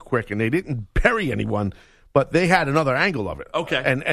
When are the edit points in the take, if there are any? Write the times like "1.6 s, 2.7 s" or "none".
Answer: none